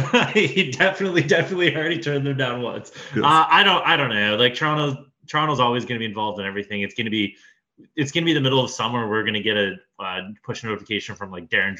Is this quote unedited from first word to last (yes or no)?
yes